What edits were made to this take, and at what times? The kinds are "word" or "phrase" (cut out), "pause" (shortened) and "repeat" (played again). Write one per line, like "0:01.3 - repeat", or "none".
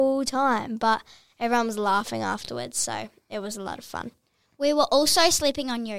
none